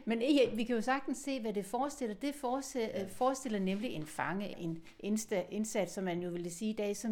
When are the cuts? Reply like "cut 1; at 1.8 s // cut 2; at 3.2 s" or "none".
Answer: cut 1; at 4.5 s